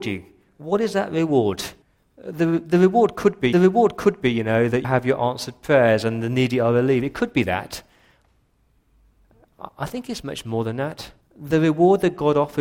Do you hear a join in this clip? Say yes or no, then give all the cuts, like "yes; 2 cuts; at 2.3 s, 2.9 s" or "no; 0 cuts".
yes; 4 cuts; at 1.8 s, 3.5 s, 4.8 s, 11.2 s